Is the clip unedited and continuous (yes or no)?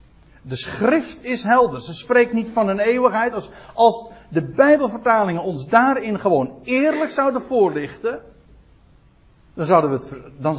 yes